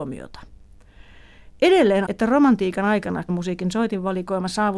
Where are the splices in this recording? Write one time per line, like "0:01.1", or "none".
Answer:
0:02.0
0:03.3